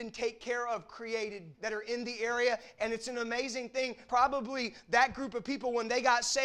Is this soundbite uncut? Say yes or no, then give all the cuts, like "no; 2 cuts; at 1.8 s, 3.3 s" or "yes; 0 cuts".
no; 2 cuts; at 1.5 s, 4.1 s